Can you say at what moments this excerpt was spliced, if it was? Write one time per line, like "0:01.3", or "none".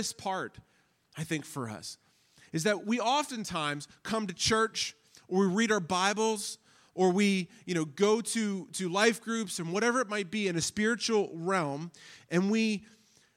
none